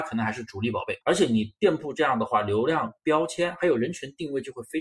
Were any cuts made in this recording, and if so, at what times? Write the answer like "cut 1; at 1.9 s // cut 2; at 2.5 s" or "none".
cut 1; at 1.0 s